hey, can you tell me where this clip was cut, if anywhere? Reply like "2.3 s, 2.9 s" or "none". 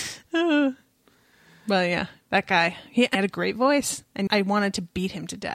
3.1 s, 4.3 s